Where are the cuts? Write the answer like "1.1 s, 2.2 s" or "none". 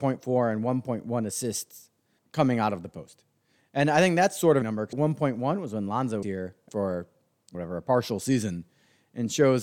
2.2 s, 4.6 s, 4.9 s, 6.2 s, 6.7 s, 7.5 s